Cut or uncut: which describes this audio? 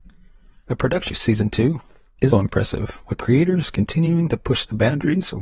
cut